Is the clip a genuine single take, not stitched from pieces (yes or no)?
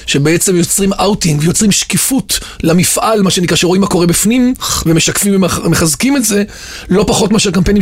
yes